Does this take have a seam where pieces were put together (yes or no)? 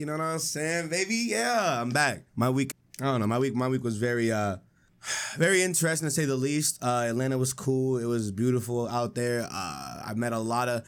yes